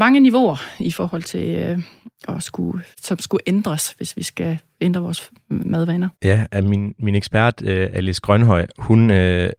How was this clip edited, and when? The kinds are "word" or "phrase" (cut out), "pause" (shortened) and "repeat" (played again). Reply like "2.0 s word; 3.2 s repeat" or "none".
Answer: 2.9 s pause; 6.1 s pause